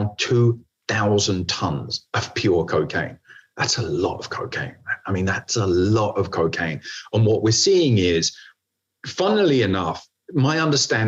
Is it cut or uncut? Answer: uncut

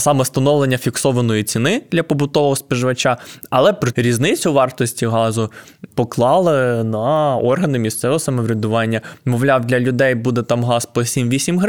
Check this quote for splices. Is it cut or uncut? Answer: cut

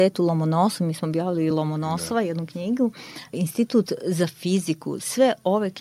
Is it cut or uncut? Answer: uncut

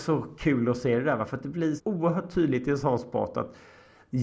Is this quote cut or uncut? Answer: cut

